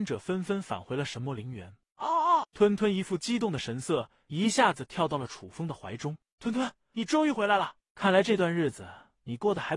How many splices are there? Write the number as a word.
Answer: one